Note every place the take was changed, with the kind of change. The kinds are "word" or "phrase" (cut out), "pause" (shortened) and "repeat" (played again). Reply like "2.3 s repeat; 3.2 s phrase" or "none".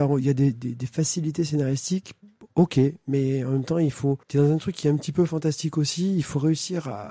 4.2 s pause